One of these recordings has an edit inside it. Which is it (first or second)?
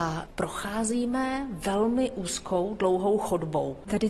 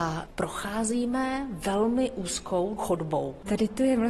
second